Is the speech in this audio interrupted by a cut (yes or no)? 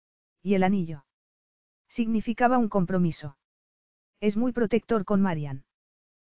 no